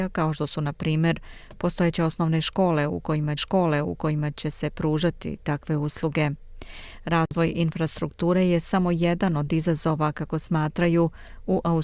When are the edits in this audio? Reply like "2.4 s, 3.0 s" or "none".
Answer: 3.4 s